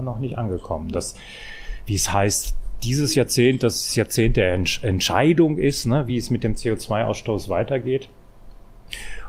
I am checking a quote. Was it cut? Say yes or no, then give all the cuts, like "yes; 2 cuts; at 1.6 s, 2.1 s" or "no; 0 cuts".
no; 0 cuts